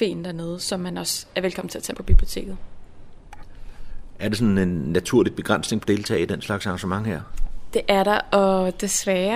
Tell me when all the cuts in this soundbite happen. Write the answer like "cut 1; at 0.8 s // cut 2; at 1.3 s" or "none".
cut 1; at 1.9 s // cut 2; at 5.8 s